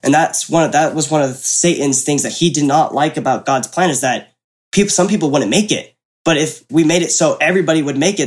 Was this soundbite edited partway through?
no; 0 cuts

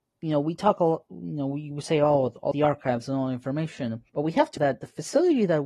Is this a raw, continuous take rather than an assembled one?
no; 3 cuts; at 2.5 s, 4.1 s, 4.6 s

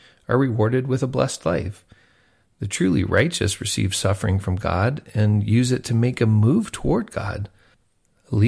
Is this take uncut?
yes; 0 cuts

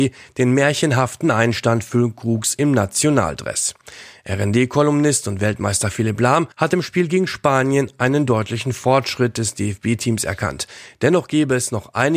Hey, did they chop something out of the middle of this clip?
yes; 1 cut; at 6.5 s

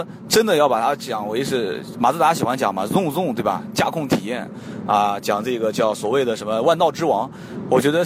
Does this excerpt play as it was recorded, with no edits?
yes; 0 cuts

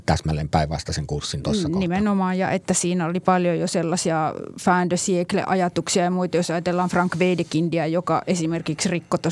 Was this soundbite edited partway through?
no; 0 cuts

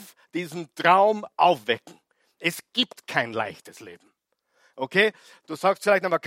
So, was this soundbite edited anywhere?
no; 0 cuts

